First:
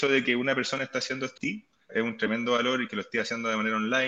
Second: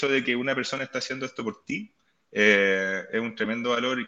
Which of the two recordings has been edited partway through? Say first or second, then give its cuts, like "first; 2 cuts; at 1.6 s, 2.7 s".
first; 2 cuts; at 1.4 s, 1.9 s